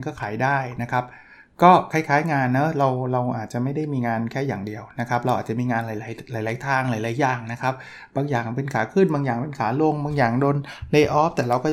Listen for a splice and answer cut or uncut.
uncut